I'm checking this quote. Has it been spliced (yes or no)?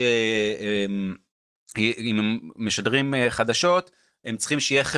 no